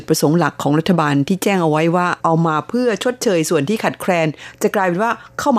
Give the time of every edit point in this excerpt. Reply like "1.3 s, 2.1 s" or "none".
2.2 s

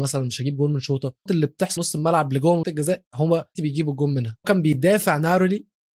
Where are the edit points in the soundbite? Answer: 1.3 s, 1.8 s, 2.6 s, 3.5 s, 4.4 s

